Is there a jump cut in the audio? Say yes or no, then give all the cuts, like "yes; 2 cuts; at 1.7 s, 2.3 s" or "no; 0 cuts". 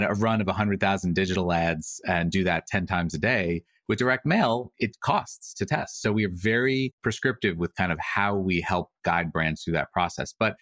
no; 0 cuts